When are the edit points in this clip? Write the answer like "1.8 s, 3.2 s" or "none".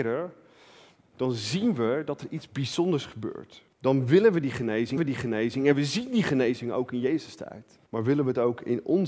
3.7 s, 5.0 s, 7.9 s